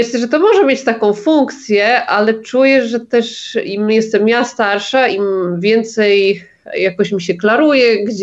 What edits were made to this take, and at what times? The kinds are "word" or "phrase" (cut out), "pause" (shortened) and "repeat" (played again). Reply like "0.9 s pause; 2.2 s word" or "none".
none